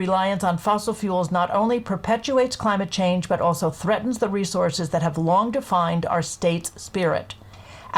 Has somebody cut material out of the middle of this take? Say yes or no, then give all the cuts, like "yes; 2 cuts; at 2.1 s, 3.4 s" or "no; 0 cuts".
no; 0 cuts